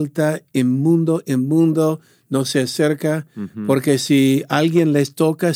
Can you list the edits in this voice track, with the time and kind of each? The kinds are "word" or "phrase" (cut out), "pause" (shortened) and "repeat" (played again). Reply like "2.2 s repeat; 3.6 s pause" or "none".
none